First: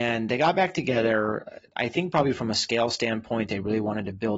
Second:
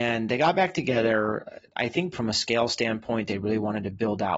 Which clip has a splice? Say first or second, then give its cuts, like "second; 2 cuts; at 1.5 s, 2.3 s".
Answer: second; 1 cut; at 2.1 s